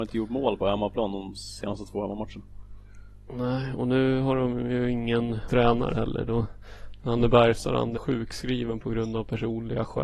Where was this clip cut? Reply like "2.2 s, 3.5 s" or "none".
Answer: 5.5 s, 8.0 s